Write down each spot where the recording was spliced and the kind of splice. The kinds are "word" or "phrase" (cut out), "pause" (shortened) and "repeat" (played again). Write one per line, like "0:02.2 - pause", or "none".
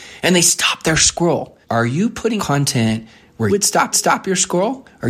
0:01.6 - pause
0:02.4 - word
0:03.5 - word
0:03.9 - repeat